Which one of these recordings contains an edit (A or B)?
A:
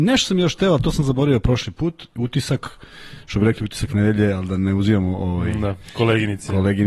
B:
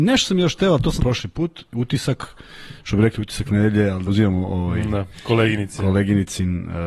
B